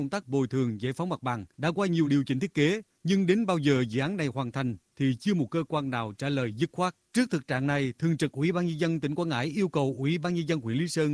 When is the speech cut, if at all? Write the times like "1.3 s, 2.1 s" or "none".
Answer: 1.5 s, 2.1 s, 7.0 s